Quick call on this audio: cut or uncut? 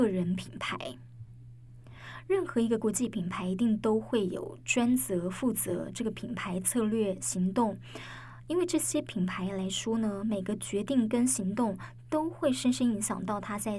uncut